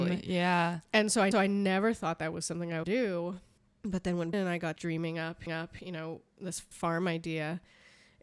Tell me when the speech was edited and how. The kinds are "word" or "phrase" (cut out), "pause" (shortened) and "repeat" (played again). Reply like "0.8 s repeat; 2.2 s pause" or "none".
1.3 s repeat; 2.8 s phrase; 3.6 s pause; 4.3 s word; 4.8 s phrase; 5.5 s repeat; 6.7 s word